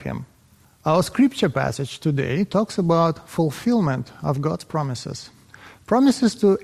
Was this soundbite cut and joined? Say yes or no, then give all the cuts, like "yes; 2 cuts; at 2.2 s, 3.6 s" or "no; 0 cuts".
no; 0 cuts